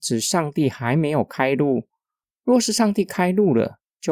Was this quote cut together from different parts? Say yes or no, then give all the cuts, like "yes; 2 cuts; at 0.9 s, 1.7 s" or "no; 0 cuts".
no; 0 cuts